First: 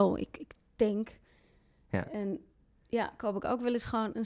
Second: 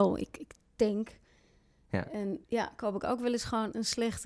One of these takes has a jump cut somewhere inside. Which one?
second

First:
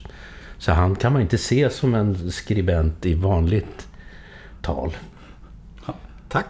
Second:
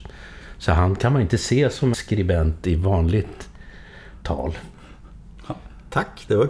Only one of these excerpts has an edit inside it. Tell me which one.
second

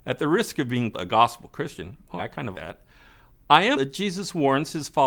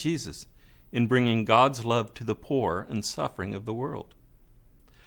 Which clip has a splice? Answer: first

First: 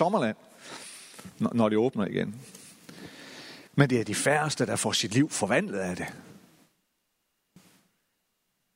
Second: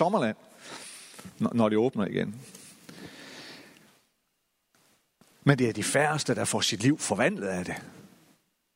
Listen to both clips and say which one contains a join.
first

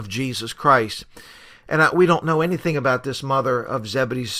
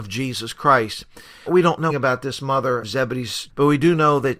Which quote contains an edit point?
second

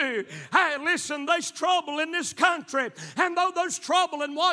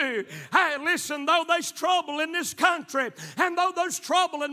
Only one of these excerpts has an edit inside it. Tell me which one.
first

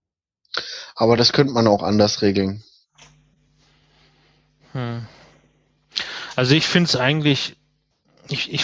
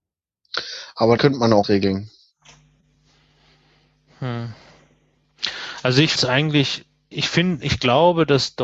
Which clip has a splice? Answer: second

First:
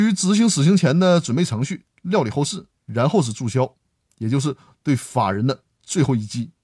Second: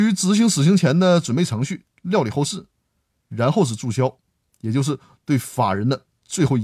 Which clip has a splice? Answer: first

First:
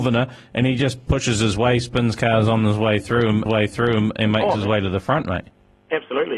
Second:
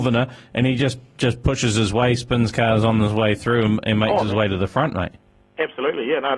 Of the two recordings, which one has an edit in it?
first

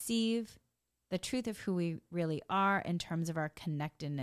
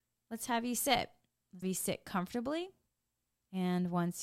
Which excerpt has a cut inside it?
second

